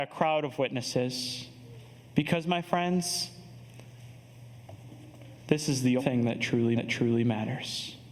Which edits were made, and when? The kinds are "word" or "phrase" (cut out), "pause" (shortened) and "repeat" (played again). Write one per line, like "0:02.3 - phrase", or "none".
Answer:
0:06.0 - word
0:06.8 - repeat